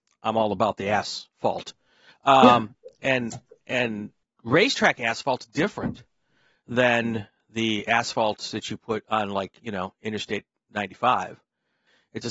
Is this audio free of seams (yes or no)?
yes